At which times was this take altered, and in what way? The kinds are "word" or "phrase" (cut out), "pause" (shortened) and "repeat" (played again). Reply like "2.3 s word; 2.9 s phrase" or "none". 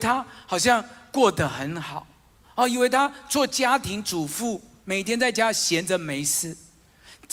2.4 s word